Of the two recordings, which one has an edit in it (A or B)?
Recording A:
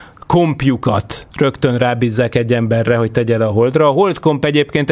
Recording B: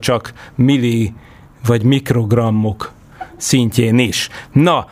A